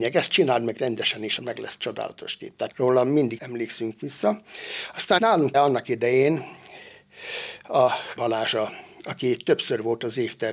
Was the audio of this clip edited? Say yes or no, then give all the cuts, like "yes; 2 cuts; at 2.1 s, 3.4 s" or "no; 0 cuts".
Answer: yes; 6 cuts; at 1.4 s, 2.7 s, 3.4 s, 5.2 s, 5.5 s, 8.2 s